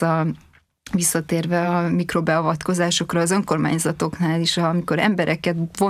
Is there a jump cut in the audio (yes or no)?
no